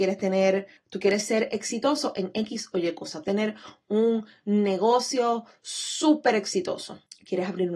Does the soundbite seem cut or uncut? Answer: cut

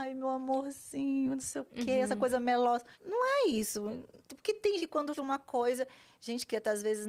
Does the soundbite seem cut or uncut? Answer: cut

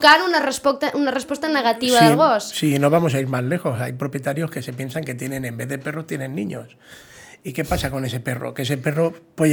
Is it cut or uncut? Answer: uncut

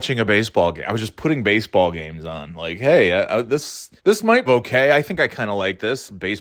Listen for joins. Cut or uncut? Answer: cut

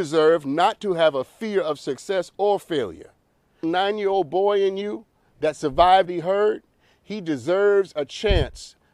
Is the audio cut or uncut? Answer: cut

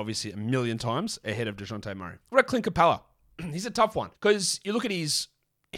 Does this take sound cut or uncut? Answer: cut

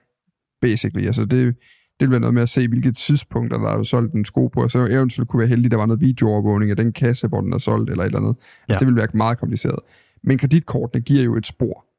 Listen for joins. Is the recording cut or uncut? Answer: uncut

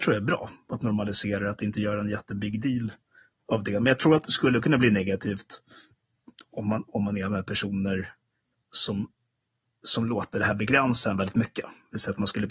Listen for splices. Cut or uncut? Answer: uncut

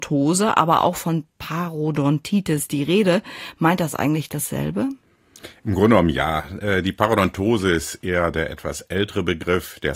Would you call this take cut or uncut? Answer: uncut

